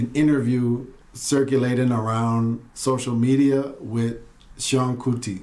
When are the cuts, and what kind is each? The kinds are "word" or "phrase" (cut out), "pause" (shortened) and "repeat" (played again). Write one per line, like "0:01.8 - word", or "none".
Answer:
0:01.0 - pause
0:02.7 - pause